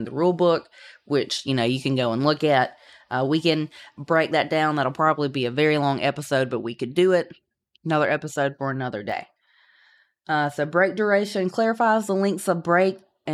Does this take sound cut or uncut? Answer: uncut